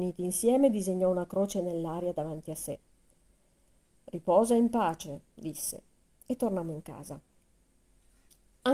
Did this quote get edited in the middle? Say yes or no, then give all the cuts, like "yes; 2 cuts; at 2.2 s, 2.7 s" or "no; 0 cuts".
no; 0 cuts